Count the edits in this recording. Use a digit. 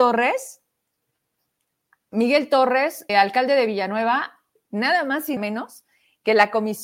3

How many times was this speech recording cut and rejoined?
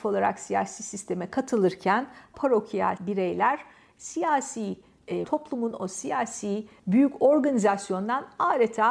3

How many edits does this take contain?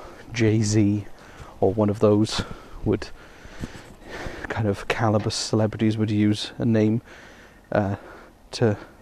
0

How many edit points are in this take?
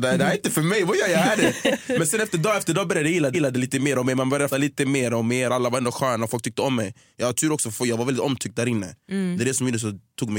2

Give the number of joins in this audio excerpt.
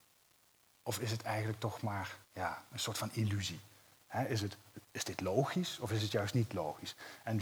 1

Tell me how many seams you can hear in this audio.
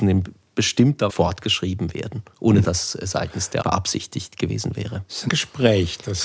4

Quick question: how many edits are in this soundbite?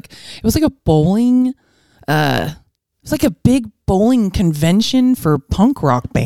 0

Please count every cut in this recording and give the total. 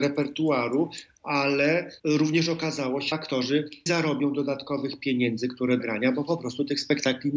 4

